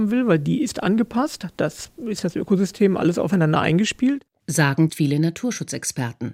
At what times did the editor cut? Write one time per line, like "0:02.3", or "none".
0:04.9